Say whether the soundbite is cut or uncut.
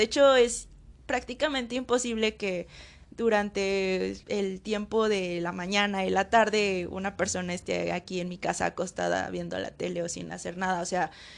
cut